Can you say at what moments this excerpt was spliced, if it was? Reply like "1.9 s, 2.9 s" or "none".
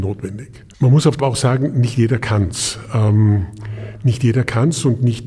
1.2 s